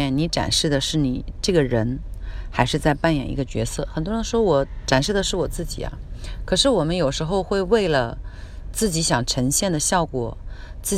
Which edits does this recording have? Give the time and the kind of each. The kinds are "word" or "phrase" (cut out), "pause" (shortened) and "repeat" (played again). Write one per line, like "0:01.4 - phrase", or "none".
0:08.7 - word